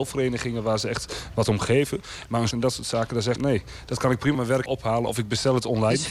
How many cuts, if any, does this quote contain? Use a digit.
4